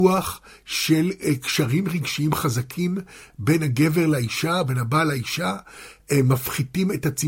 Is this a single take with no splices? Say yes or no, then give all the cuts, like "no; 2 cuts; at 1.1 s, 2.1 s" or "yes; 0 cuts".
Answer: yes; 0 cuts